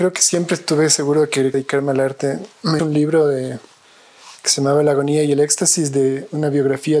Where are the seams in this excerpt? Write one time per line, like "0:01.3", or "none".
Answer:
0:01.5
0:02.8
0:04.4